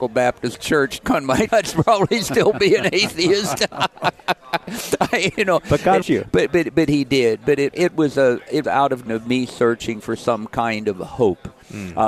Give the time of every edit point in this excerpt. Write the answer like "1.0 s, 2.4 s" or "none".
1.0 s, 1.5 s, 6.0 s, 6.5 s, 7.7 s, 8.6 s, 9.1 s